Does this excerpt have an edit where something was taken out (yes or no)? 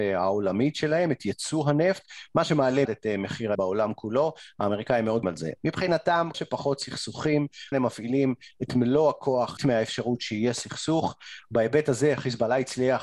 yes